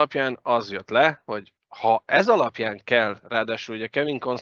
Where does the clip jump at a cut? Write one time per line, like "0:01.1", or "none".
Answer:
0:01.6